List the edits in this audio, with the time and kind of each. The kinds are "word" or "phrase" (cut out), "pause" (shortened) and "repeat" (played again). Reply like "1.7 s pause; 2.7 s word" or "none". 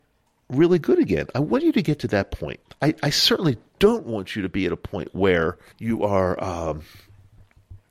2.7 s pause; 5.7 s pause